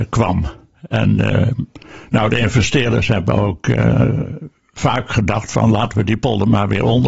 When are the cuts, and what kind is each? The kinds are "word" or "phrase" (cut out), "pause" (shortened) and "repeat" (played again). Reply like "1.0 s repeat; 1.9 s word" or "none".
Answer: none

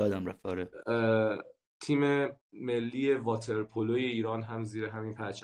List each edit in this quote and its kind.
2.4 s pause

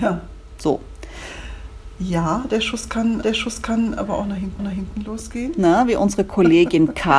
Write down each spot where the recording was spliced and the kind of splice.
3.2 s repeat; 4.6 s repeat

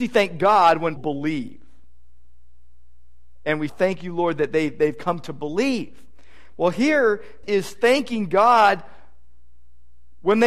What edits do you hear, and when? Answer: 1.0 s word; 3.7 s phrase; 7.4 s word

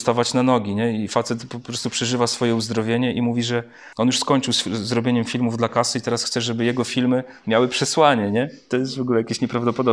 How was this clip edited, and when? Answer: 3.9 s pause

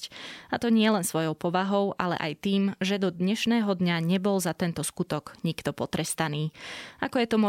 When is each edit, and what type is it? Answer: none

